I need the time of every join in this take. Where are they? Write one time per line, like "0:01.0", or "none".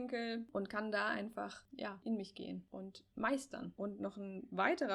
none